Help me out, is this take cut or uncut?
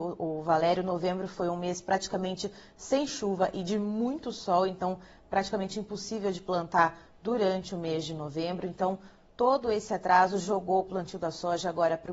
uncut